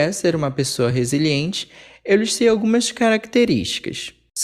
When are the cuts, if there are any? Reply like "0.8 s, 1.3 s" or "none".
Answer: none